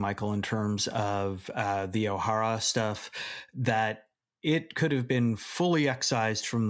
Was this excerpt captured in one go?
yes; 0 cuts

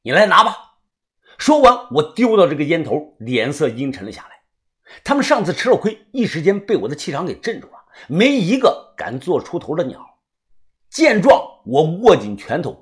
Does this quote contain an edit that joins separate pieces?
no; 0 cuts

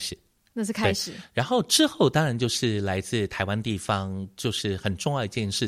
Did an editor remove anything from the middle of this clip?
no; 0 cuts

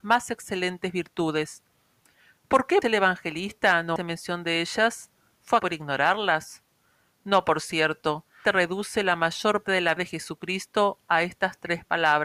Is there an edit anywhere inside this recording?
yes; 6 cuts; at 2.8 s, 4.0 s, 5.6 s, 8.4 s, 9.6 s, 10.0 s

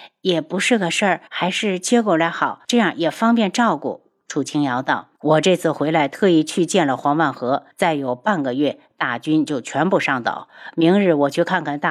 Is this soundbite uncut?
no; 4 cuts; at 1.3 s, 2.6 s, 5.1 s, 7.7 s

